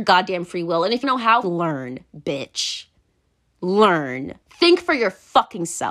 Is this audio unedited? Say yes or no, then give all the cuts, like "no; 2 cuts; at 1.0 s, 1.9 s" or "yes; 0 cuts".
no; 3 cuts; at 1.0 s, 1.4 s, 4.4 s